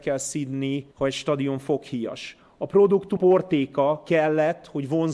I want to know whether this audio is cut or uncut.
cut